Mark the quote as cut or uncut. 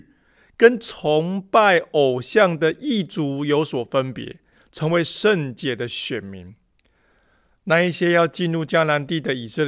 uncut